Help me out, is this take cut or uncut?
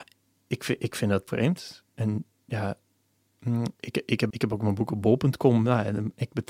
cut